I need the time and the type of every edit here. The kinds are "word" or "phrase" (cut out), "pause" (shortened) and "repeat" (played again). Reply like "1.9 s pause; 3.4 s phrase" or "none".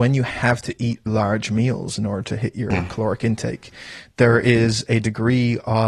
1.1 s word